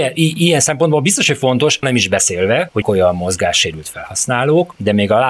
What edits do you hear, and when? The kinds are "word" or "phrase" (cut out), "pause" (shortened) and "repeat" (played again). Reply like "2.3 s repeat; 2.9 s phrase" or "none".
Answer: 1.8 s word; 2.8 s word